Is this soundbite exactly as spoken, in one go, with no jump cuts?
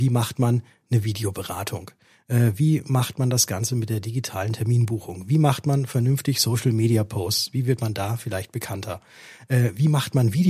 yes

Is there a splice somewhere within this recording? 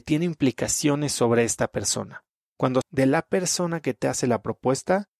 yes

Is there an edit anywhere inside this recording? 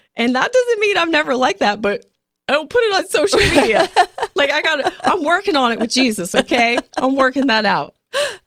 no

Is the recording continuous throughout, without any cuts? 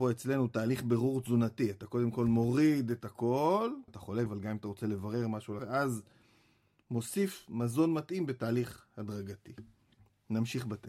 no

